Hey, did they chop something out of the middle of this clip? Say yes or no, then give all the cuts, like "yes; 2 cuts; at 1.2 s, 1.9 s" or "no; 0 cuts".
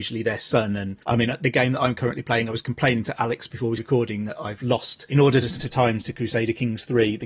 yes; 3 cuts; at 1.0 s, 3.8 s, 5.6 s